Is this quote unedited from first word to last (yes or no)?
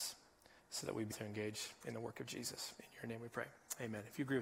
no